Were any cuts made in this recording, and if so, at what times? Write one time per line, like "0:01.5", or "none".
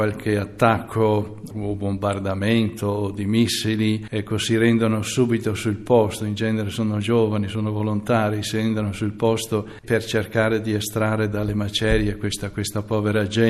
none